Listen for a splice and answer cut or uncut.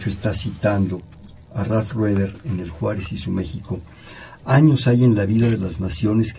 uncut